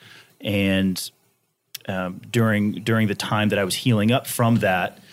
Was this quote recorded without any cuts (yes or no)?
yes